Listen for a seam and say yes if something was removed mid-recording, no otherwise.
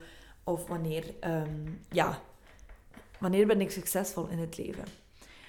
no